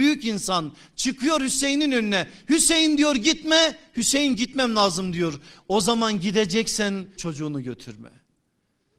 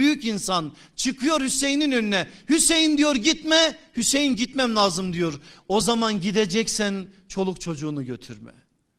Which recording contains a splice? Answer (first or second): first